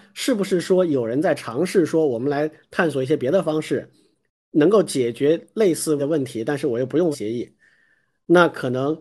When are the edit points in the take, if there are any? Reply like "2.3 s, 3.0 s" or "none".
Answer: 6.0 s, 7.1 s

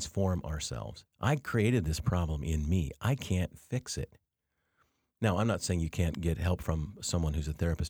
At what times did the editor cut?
1.1 s

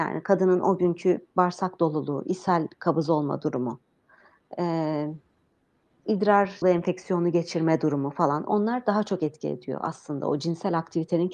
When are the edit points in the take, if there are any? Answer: 6.6 s

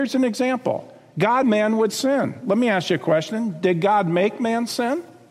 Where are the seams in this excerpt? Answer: 1.4 s

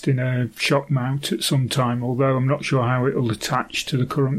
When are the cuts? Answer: none

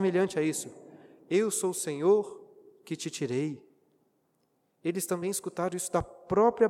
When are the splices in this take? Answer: none

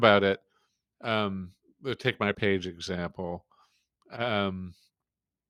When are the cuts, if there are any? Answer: 2.3 s

